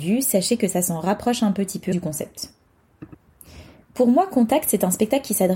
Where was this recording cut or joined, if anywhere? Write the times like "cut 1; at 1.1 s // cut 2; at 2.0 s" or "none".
cut 1; at 1.9 s